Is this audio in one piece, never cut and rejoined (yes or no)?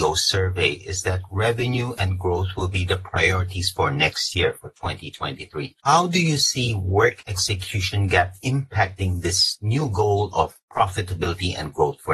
yes